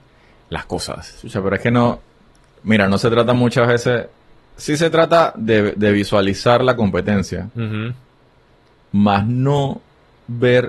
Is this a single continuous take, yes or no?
yes